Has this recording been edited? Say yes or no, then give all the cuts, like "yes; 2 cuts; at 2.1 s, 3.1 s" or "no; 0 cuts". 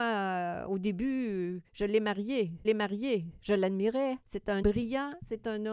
yes; 4 cuts; at 1.7 s, 2.6 s, 4.2 s, 4.6 s